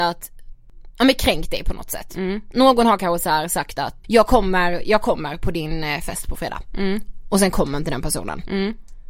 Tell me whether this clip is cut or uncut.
cut